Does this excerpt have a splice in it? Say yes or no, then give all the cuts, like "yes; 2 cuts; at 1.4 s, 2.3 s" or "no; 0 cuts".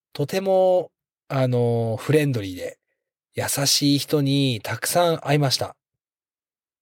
no; 0 cuts